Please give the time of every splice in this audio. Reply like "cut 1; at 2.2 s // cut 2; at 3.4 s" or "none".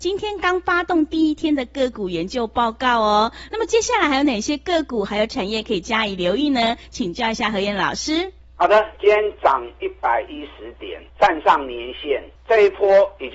cut 1; at 11.1 s // cut 2; at 12.4 s